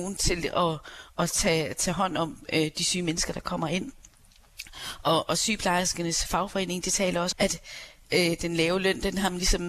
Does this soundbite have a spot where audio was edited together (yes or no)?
yes